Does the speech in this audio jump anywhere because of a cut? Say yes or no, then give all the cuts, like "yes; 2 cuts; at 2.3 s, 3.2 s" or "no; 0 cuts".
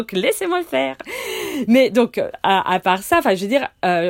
no; 0 cuts